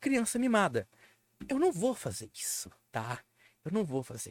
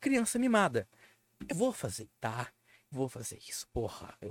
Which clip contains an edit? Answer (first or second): second